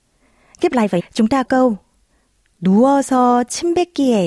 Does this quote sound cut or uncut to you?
cut